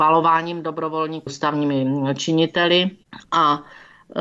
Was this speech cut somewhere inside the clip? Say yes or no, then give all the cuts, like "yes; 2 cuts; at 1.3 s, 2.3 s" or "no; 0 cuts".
yes; 1 cut; at 1.3 s